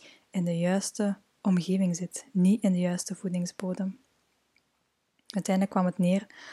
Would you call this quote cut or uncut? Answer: uncut